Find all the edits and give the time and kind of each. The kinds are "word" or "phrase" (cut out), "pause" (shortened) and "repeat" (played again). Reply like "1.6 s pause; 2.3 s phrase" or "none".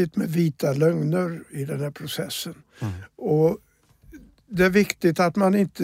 none